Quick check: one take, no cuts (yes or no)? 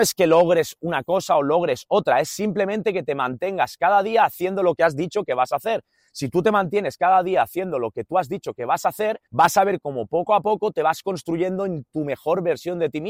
no